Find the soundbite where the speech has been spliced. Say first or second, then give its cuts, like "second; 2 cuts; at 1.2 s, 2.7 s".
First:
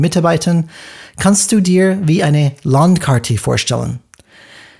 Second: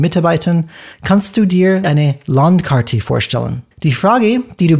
second; 3 cuts; at 0.9 s, 1.8 s, 3.7 s